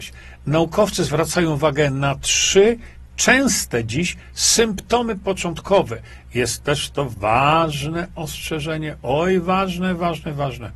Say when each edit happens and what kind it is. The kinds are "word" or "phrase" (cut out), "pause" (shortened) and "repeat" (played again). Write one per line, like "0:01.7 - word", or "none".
none